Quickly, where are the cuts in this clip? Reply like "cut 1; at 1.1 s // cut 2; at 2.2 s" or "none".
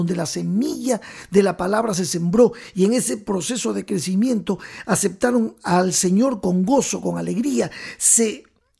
none

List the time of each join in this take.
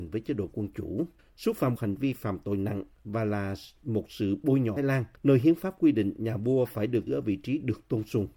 cut 1; at 1.2 s // cut 2; at 1.8 s // cut 3; at 4.8 s // cut 4; at 5.2 s // cut 5; at 7.1 s

